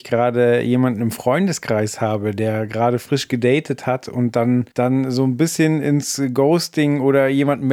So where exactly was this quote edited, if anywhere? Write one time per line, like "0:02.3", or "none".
0:04.7